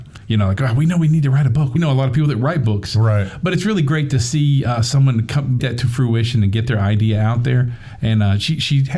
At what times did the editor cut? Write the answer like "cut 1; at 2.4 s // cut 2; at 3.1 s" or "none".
cut 1; at 1.8 s // cut 2; at 5.6 s